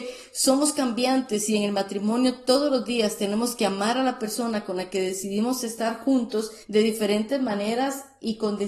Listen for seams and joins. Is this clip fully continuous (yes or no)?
no